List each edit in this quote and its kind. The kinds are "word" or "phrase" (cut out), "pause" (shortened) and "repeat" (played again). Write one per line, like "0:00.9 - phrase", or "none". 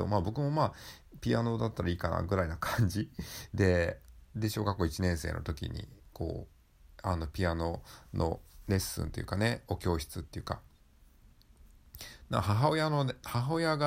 0:04.2 - pause